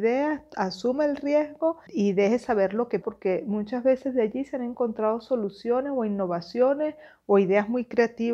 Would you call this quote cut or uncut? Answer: cut